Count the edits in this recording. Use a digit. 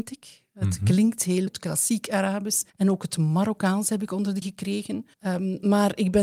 4